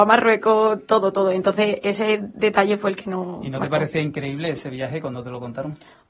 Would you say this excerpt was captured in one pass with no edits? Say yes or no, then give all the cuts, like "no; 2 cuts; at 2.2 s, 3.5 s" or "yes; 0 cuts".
yes; 0 cuts